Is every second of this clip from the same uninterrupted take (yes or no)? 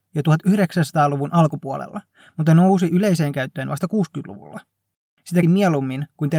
no